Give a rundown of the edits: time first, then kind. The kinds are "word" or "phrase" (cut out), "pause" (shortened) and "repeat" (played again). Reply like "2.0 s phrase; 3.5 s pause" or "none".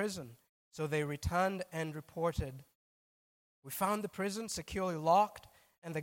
none